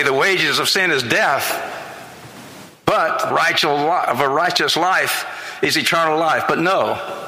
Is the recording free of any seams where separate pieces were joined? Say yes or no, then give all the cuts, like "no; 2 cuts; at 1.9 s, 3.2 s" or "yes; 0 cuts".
no; 1 cut; at 3.3 s